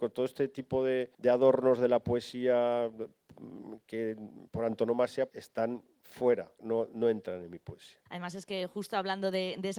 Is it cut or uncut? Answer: cut